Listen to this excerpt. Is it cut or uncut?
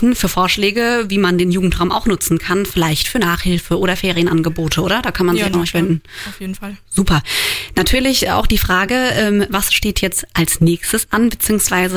uncut